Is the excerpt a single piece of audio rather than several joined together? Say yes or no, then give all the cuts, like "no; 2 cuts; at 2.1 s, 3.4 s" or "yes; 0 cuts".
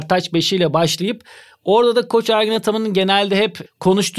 yes; 0 cuts